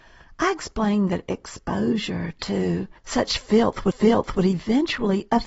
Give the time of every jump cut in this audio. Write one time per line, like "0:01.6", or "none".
0:03.0
0:03.9